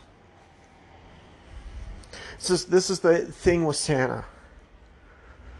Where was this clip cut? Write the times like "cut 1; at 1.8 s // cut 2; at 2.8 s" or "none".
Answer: cut 1; at 2.5 s